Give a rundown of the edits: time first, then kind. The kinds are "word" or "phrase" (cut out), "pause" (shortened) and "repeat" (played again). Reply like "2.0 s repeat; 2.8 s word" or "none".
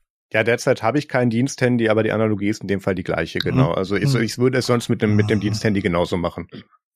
none